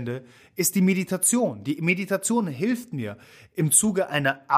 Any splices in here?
no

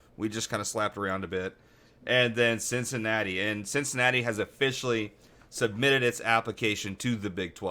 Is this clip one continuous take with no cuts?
yes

